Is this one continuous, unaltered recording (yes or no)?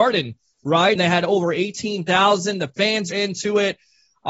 no